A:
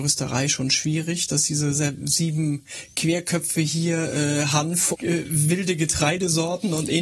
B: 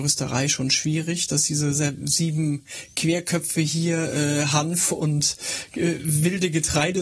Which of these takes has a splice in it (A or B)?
A